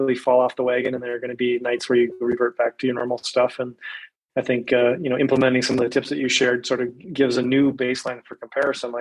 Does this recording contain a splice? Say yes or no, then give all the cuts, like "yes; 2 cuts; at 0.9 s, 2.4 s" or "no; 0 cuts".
no; 0 cuts